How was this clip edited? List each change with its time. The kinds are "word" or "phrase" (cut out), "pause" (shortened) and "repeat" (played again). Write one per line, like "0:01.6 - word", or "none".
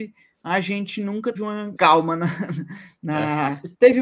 0:01.4 - word
0:01.8 - word

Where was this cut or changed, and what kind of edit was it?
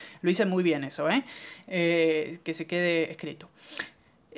none

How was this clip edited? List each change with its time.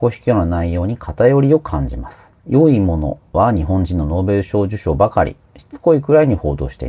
0:02.4 - pause

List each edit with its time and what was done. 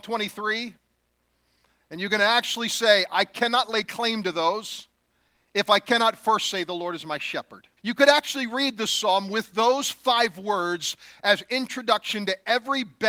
0:07.8 - pause

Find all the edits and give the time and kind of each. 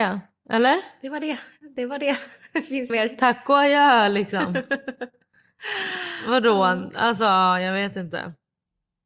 0:02.9 - word

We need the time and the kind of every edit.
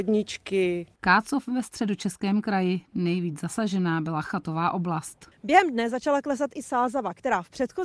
none

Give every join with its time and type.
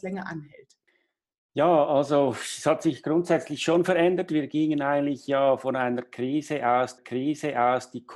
0:07.0 - repeat

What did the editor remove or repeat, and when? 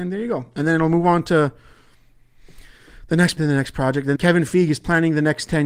0:03.4 - word
0:04.2 - word

